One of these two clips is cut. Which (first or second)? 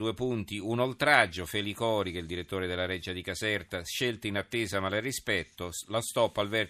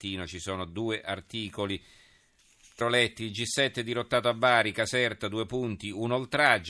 second